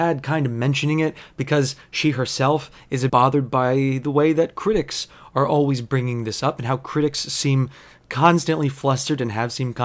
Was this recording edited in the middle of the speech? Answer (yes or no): yes